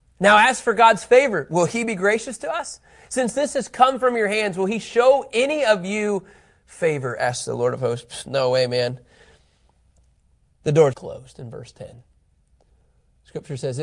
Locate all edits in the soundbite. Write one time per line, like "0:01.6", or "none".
0:10.9